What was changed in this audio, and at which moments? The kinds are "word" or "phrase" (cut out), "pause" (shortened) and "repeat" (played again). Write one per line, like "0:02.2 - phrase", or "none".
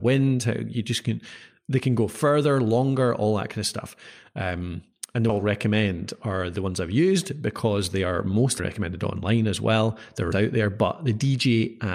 0:05.3 - word
0:08.6 - word
0:10.3 - word